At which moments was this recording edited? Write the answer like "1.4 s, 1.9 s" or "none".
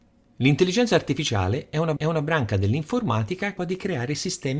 2.0 s, 3.6 s